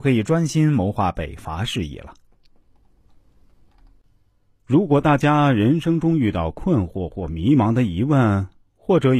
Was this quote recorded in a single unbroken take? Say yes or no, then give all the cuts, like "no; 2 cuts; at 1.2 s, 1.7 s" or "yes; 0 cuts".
yes; 0 cuts